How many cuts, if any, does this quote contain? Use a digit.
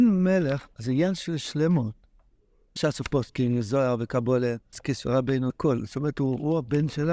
3